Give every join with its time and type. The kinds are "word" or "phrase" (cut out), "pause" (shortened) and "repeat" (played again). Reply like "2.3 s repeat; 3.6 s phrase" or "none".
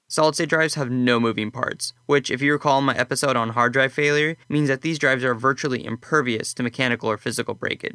4.4 s pause